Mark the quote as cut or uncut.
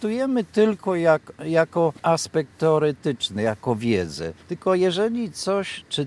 cut